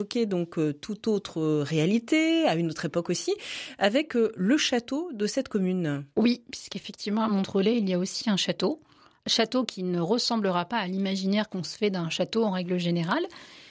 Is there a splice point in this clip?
no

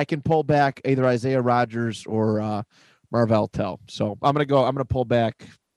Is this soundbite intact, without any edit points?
yes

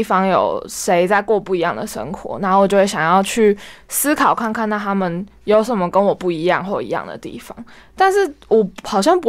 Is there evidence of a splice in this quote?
no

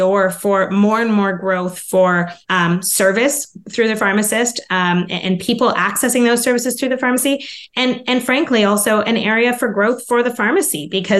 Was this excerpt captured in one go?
no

